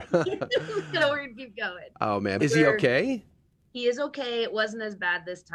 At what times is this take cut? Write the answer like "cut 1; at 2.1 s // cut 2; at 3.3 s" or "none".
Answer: cut 1; at 2.4 s // cut 2; at 3.6 s